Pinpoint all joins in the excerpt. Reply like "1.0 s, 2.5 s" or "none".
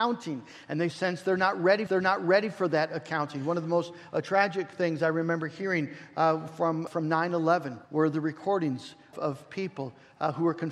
1.9 s, 6.9 s, 7.8 s, 9.1 s